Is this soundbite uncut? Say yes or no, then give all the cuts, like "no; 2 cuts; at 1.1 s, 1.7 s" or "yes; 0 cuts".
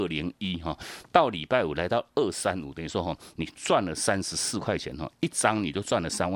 yes; 0 cuts